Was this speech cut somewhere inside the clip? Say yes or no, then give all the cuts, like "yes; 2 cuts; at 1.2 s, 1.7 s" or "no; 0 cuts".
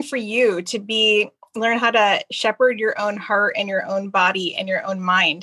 no; 0 cuts